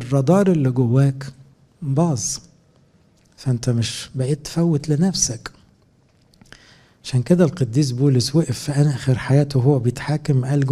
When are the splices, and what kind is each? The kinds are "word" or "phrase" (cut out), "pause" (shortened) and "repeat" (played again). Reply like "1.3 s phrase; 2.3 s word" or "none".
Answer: none